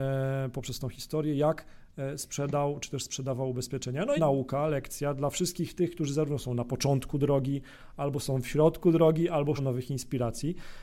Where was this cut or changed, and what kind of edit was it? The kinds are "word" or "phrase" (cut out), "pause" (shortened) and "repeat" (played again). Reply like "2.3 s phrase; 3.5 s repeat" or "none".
4.2 s phrase; 9.6 s word